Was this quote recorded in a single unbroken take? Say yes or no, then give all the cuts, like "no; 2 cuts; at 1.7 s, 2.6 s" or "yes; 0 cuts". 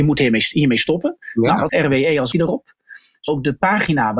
no; 3 cuts; at 1.7 s, 2.3 s, 3.3 s